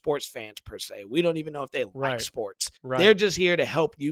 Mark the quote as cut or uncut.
cut